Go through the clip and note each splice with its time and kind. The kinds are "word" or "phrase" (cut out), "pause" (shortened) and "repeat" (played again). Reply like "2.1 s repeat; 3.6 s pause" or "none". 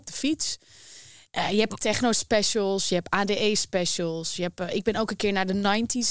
none